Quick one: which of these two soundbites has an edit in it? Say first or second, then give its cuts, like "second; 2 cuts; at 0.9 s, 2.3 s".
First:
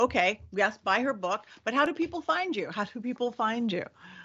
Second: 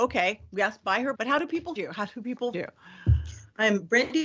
second; 3 cuts; at 1.1 s, 1.8 s, 2.5 s